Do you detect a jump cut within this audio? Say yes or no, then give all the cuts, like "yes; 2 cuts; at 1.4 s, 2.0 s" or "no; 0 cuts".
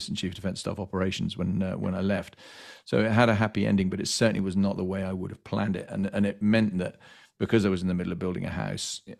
no; 0 cuts